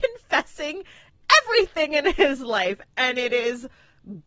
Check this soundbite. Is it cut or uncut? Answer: uncut